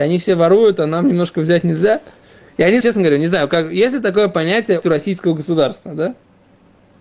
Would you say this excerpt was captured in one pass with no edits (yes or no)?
no